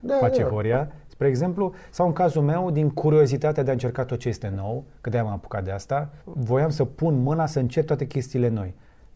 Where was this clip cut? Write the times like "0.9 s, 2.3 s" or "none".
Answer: 6.2 s